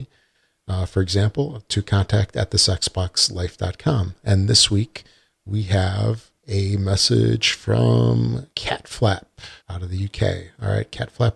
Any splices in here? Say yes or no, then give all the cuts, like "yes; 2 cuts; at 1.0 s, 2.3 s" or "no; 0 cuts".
yes; 3 cuts; at 6.4 s, 8.5 s, 9.6 s